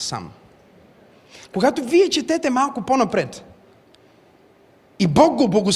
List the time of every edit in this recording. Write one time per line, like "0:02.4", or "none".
none